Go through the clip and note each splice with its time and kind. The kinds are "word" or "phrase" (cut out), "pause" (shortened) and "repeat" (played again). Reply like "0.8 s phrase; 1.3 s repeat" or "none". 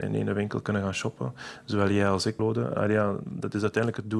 2.7 s word